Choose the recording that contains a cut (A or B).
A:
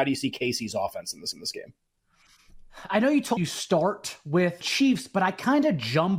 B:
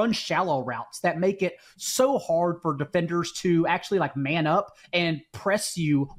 A